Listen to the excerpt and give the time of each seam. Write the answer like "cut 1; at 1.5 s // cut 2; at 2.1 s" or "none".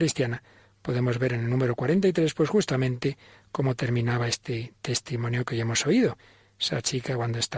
none